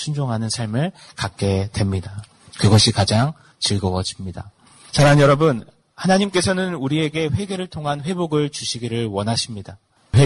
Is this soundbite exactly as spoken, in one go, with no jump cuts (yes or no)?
yes